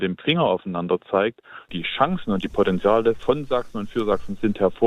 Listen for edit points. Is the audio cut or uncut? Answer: uncut